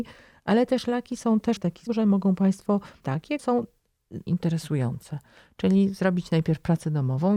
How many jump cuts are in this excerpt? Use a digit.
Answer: 5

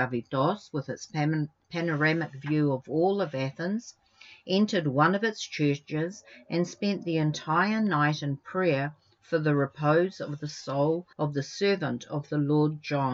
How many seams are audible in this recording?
1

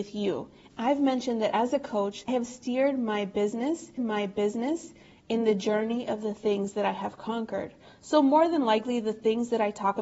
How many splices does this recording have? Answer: 2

